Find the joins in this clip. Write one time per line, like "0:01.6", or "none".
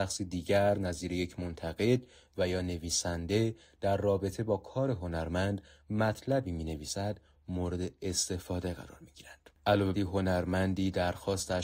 0:09.9